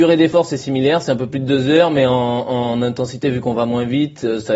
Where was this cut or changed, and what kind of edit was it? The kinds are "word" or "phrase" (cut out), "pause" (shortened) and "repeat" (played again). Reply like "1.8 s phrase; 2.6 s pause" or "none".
none